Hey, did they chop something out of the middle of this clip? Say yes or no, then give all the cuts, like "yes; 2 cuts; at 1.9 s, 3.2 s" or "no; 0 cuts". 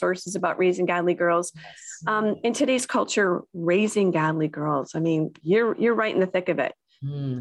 no; 0 cuts